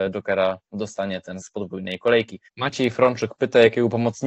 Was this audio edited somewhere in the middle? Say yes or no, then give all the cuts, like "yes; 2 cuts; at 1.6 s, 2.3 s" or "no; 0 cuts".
yes; 2 cuts; at 1.4 s, 2.5 s